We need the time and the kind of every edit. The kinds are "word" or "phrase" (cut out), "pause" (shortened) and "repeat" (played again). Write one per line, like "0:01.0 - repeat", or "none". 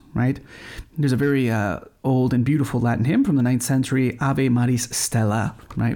none